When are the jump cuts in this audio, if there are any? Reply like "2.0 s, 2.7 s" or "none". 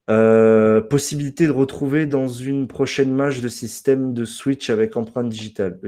none